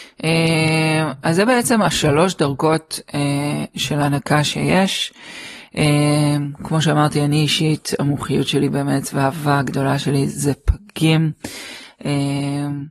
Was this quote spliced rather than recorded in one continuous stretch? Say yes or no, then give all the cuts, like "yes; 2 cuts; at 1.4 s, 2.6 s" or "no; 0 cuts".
no; 0 cuts